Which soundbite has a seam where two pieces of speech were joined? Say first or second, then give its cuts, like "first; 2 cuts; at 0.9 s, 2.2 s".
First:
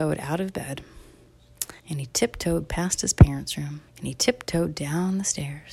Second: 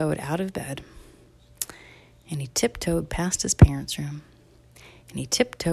first; 2 cuts; at 1.8 s, 3.9 s